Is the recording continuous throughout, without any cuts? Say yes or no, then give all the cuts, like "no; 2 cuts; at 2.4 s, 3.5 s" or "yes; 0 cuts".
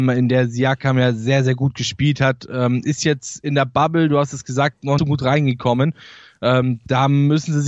no; 1 cut; at 5.0 s